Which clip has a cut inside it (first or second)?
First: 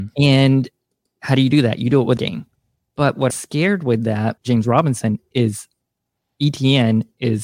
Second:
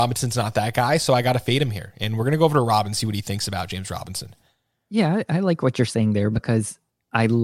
first